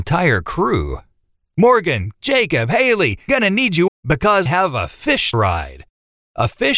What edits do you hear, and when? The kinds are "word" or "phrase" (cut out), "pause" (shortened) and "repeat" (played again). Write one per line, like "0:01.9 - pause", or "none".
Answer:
0:02.2 - word
0:03.3 - word
0:03.9 - word
0:04.5 - word
0:05.3 - word